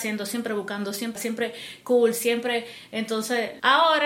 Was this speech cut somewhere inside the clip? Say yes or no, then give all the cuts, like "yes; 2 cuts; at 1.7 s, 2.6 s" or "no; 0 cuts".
yes; 1 cut; at 1.2 s